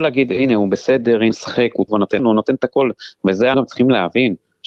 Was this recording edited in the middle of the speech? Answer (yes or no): yes